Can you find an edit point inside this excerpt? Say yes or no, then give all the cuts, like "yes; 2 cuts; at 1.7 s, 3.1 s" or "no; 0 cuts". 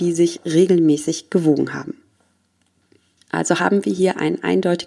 no; 0 cuts